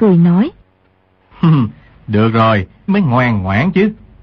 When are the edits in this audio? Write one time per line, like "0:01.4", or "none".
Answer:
0:02.9

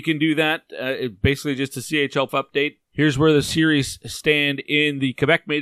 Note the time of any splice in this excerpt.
0:02.3
0:02.8

